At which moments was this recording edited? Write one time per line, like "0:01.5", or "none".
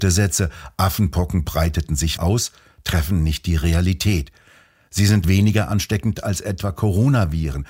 0:02.2
0:05.2